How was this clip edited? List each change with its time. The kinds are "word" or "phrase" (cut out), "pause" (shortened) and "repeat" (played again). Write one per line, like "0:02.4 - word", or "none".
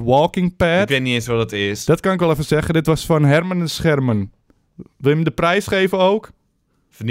none